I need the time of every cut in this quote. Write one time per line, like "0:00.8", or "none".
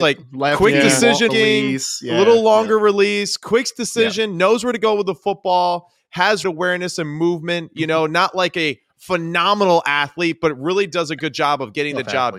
0:01.3
0:06.4